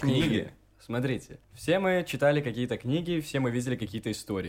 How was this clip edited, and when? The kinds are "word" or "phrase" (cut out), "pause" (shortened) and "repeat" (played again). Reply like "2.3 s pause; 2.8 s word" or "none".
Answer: 1.4 s pause